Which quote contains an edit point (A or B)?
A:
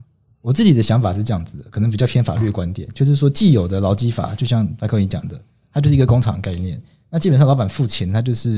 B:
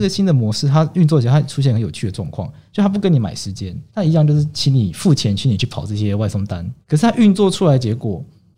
B